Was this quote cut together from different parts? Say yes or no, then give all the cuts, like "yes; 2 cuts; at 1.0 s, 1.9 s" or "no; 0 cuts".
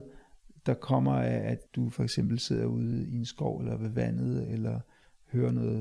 yes; 1 cut; at 1.7 s